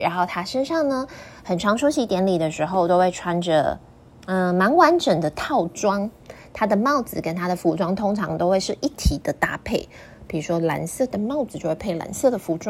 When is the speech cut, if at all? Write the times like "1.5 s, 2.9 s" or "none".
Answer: none